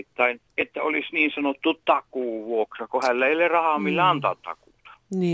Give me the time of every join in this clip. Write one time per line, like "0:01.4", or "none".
none